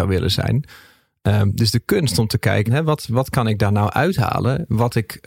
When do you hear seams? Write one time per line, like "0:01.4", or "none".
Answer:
0:02.7
0:03.1